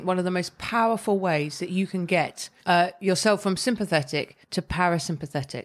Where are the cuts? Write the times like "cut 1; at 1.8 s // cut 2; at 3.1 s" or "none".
cut 1; at 2.6 s // cut 2; at 4.4 s